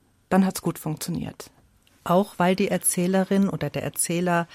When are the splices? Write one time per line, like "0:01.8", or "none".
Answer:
none